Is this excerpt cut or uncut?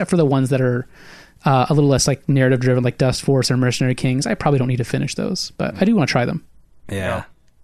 uncut